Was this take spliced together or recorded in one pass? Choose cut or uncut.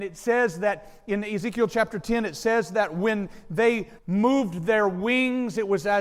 cut